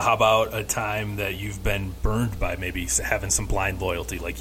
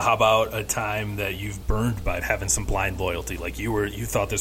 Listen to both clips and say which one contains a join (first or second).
second